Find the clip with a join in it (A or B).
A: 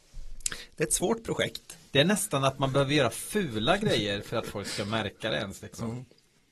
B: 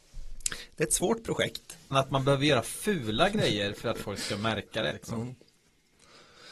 B